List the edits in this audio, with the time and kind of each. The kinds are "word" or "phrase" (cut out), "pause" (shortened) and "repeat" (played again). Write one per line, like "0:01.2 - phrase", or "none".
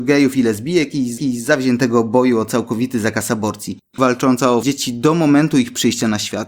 0:01.2 - repeat
0:04.6 - word